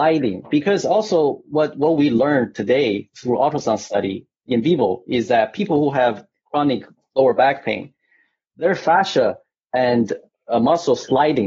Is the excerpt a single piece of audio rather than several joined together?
yes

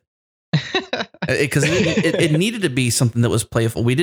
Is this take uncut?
yes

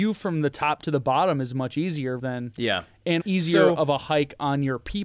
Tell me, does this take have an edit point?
yes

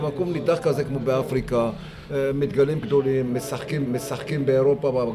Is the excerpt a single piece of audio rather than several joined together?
no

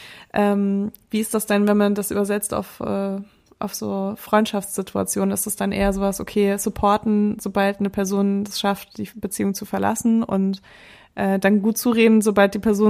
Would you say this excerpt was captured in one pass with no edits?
yes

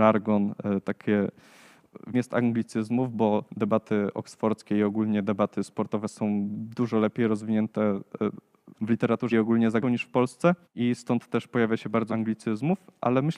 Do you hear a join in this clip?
yes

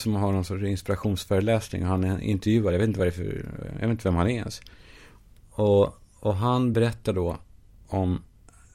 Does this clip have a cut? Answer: no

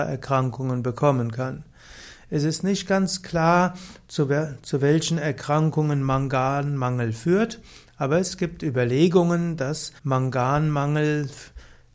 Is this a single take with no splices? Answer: no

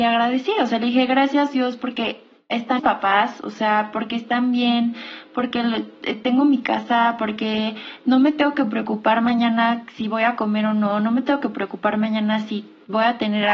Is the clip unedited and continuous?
no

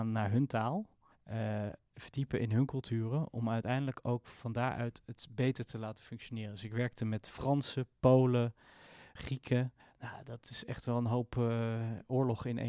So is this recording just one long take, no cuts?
no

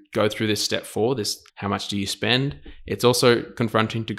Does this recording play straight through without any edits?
no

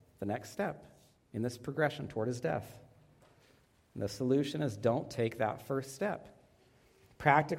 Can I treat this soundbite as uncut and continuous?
no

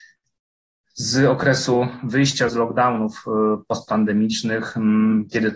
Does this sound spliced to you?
yes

